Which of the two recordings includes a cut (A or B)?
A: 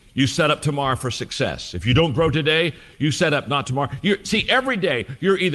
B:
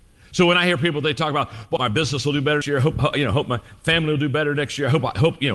B